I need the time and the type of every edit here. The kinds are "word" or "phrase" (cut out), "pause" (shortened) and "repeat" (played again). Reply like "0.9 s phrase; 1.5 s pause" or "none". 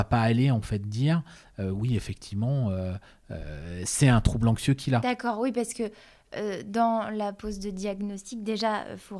none